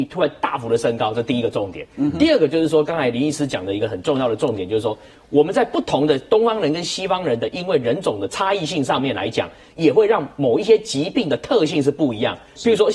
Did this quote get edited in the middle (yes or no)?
no